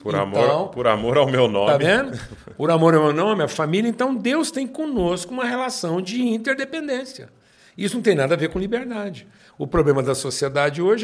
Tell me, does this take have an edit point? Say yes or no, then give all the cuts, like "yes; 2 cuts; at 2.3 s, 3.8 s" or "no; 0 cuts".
no; 0 cuts